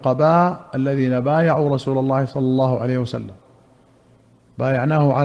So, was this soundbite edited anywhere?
no; 0 cuts

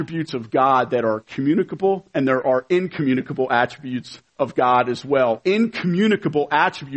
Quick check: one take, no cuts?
no; 1 cut; at 4.3 s

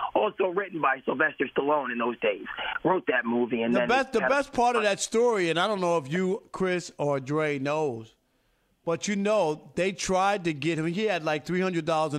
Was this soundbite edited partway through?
no; 0 cuts

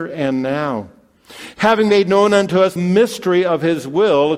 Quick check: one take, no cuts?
no; 1 cut; at 2.8 s

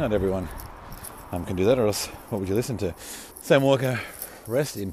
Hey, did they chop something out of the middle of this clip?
yes; 1 cut; at 3.3 s

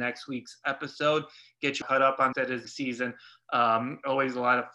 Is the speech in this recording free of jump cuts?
no; 3 cuts; at 1.8 s, 2.3 s, 2.6 s

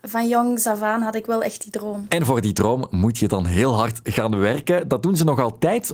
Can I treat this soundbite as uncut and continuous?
yes; 0 cuts

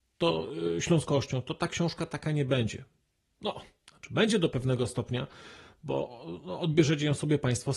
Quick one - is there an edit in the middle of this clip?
no; 0 cuts

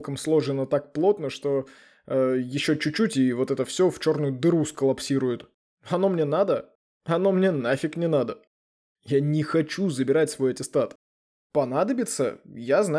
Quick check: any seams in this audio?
no; 0 cuts

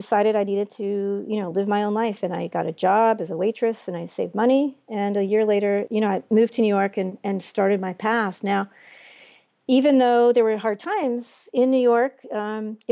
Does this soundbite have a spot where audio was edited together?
no; 0 cuts

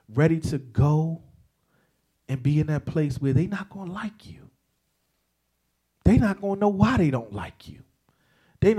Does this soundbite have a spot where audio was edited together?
no; 0 cuts

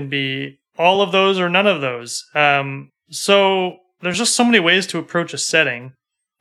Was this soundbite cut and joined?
no; 0 cuts

